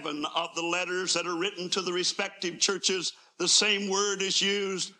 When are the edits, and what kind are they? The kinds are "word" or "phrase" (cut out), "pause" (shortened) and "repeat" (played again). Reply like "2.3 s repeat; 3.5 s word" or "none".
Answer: none